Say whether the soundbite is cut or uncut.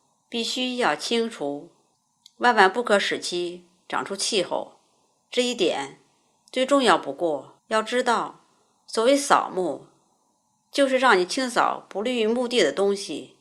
cut